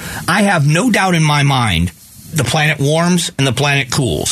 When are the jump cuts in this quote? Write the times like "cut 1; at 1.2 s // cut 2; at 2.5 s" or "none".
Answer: cut 1; at 2.3 s